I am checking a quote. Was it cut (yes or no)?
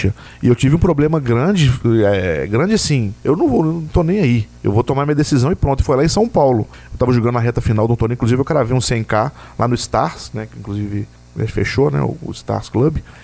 yes